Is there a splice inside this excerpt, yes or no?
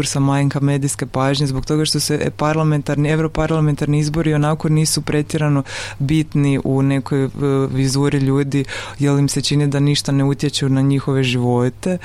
no